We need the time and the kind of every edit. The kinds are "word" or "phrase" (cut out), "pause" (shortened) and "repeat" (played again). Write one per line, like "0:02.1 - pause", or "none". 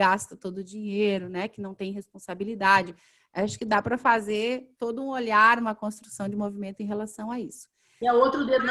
none